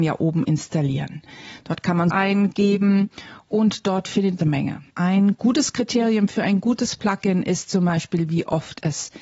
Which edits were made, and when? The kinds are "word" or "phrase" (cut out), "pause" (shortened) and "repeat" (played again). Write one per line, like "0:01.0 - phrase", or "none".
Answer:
0:02.1 - word
0:04.4 - phrase
0:04.9 - pause